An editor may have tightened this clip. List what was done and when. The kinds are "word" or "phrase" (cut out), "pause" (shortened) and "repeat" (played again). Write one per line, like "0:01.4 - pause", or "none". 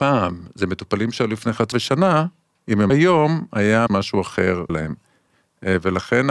0:01.7 - word
0:02.9 - word
0:03.9 - word
0:04.7 - word